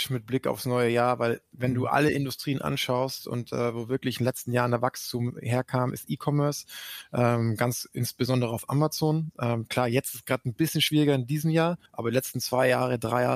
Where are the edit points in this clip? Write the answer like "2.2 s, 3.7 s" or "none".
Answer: 11.9 s